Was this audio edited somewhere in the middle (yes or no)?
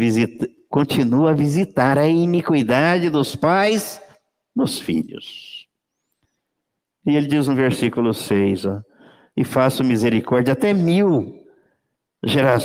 no